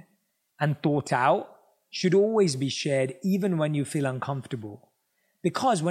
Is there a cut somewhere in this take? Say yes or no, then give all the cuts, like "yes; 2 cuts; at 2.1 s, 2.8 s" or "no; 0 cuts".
no; 0 cuts